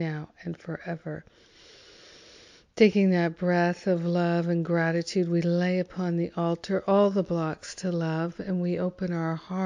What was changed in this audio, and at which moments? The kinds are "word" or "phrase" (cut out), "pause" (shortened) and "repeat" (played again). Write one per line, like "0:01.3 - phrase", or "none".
none